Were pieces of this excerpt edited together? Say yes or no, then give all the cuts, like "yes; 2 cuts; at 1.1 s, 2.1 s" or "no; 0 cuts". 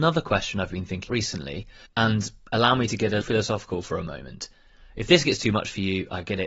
yes; 3 cuts; at 1.1 s, 1.9 s, 3.2 s